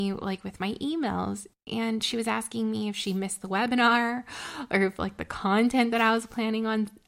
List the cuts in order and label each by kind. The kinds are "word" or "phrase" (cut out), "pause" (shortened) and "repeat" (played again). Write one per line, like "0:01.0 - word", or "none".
none